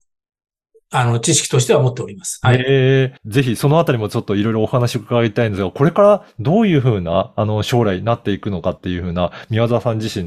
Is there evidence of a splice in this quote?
yes; 1 cut; at 3.2 s

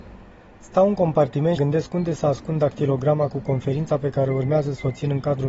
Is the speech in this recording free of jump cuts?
no; 1 cut; at 1.6 s

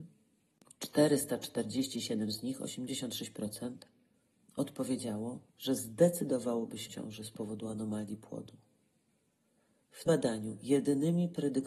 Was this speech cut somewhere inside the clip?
yes; 3 cuts; at 5.5 s, 6.9 s, 10.1 s

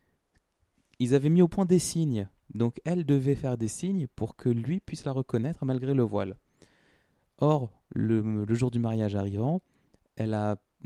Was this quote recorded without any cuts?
yes; 0 cuts

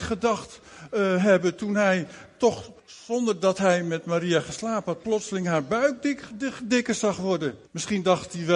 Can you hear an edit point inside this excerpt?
yes; 2 cuts; at 2.8 s, 7.7 s

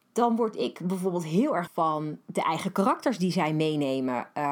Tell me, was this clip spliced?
yes; 1 cut; at 1.7 s

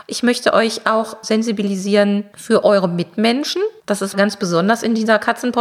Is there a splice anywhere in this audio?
yes; 2 cuts; at 3.8 s, 4.1 s

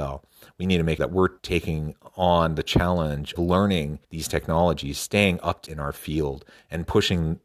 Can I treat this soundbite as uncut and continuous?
no; 5 cuts; at 1.0 s, 1.4 s, 3.4 s, 4.0 s, 5.7 s

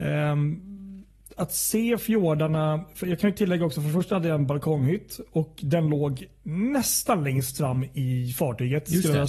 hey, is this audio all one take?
yes; 0 cuts

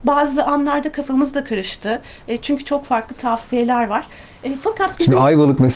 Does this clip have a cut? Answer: no; 0 cuts

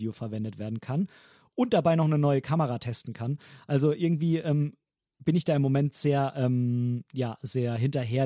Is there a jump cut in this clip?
no; 0 cuts

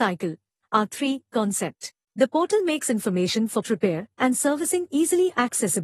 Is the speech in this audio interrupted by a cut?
yes; 2 cuts; at 2.0 s, 3.6 s

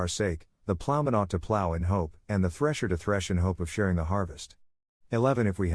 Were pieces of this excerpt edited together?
no; 0 cuts

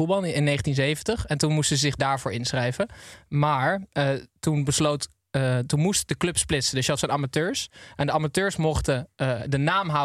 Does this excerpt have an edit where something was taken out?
yes; 2 cuts; at 2.0 s, 7.0 s

